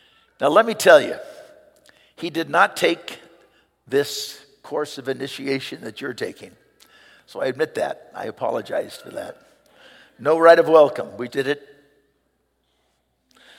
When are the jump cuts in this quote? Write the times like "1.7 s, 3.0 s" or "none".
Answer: 11.3 s